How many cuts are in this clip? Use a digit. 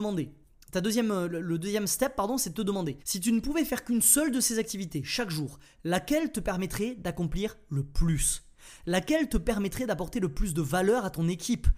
1